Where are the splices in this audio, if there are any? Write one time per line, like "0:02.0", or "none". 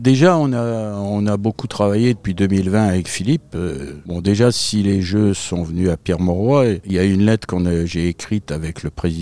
none